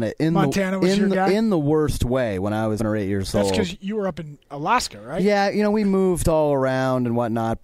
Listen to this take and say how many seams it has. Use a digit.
1